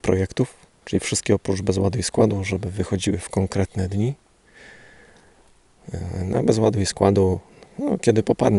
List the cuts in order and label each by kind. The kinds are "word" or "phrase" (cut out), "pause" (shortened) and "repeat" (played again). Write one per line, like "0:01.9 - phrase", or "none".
none

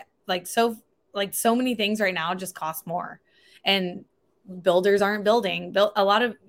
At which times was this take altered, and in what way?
none

